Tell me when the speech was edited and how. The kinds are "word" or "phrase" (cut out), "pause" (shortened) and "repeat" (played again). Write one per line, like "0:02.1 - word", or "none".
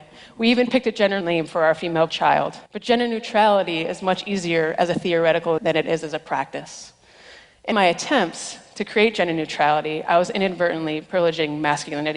0:01.2 - word
0:02.1 - word
0:02.7 - pause
0:05.6 - word
0:07.7 - word